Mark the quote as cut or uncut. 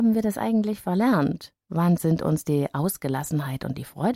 uncut